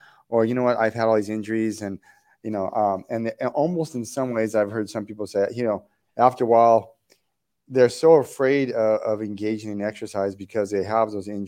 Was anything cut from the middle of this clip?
no; 0 cuts

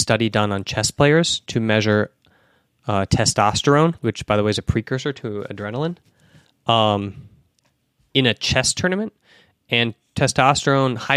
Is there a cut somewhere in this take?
yes; 1 cut; at 4.0 s

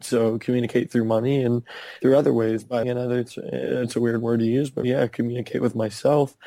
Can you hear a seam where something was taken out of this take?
yes; 2 cuts; at 2.8 s, 4.8 s

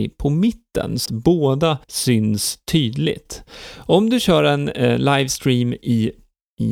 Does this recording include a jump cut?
yes; 2 cuts; at 1.1 s, 1.8 s

